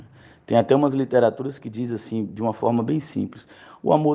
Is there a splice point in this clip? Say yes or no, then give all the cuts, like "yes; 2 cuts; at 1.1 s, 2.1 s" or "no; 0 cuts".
no; 0 cuts